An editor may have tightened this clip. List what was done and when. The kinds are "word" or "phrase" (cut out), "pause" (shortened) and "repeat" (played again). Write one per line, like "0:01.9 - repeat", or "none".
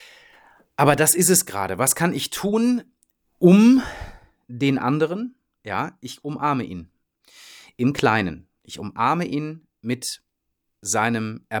none

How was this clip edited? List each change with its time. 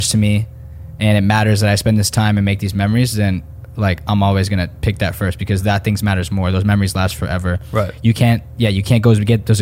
none

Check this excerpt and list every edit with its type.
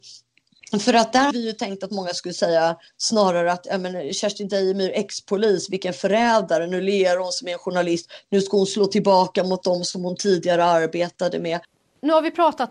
0:01.3 - word

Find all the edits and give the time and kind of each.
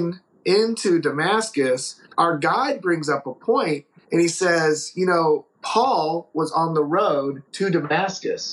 0:07.5 - pause

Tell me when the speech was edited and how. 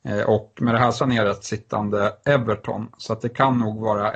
0:01.0 - phrase
0:01.4 - word

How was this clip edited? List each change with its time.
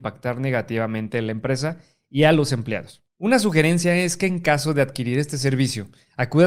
none

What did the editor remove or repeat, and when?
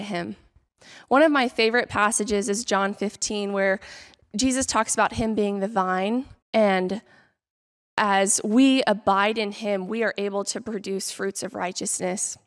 0:04.2 - pause
0:06.4 - pause

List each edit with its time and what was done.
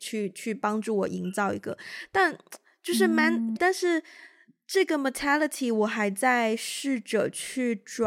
0:03.6 - phrase

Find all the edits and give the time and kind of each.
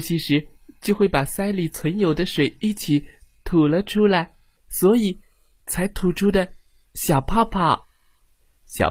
0:04.6 - pause

